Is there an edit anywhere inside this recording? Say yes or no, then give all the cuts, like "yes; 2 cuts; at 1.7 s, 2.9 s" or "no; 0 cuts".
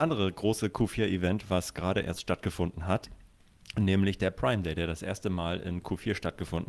no; 0 cuts